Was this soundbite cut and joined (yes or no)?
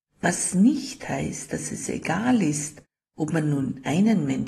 no